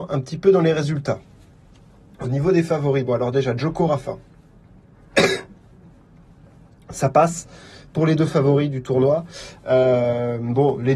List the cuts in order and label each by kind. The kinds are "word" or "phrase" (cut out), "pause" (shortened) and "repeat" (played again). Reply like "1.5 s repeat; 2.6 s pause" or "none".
none